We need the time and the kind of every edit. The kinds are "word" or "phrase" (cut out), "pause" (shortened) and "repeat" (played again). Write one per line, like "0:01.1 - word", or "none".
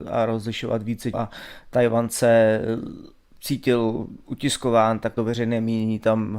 0:01.1 - word
0:03.3 - pause
0:05.2 - phrase